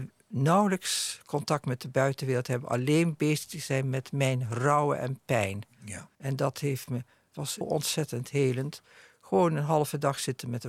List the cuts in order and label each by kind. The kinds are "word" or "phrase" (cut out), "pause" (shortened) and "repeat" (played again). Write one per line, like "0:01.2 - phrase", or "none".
0:06.1 - pause
0:07.6 - word